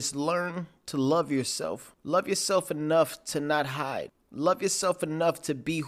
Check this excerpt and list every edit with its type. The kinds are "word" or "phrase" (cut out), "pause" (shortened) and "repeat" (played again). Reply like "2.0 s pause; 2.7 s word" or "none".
none